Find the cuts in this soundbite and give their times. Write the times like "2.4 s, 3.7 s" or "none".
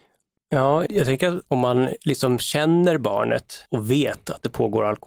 3.7 s